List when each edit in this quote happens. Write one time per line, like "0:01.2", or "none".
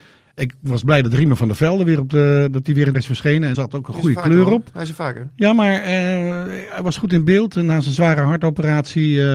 0:02.9
0:03.5